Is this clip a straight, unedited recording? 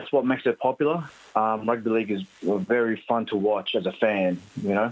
yes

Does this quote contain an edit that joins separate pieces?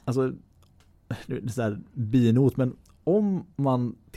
no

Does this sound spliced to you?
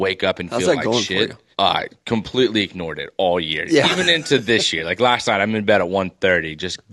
yes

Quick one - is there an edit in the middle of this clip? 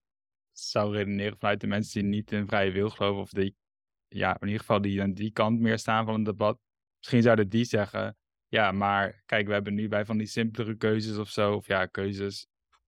yes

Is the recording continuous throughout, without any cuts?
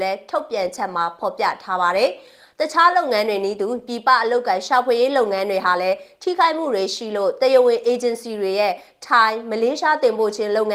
yes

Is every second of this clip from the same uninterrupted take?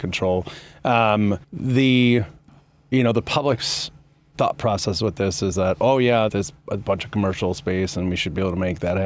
no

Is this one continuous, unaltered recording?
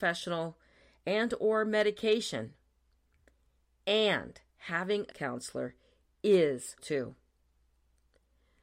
no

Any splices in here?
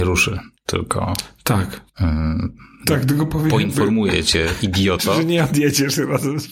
yes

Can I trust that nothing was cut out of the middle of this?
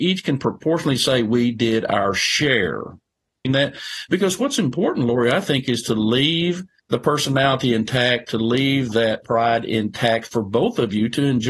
no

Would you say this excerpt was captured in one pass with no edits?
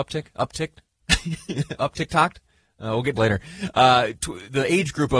no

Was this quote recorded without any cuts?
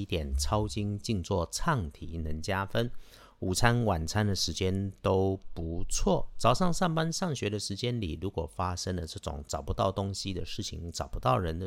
yes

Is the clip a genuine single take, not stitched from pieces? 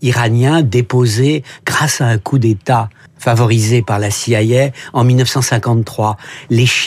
no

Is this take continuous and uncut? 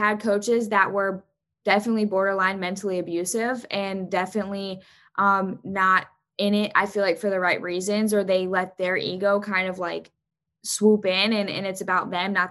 yes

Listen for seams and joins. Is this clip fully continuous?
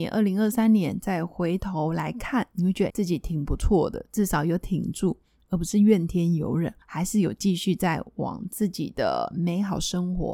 no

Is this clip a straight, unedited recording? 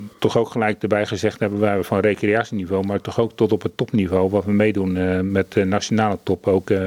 yes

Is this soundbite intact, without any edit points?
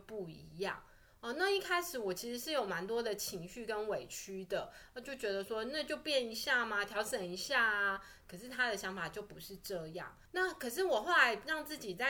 no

